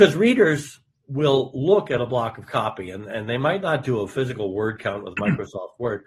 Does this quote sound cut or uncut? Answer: uncut